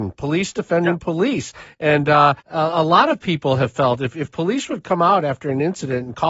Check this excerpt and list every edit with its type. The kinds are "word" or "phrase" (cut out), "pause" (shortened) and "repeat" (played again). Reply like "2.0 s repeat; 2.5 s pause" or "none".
2.4 s pause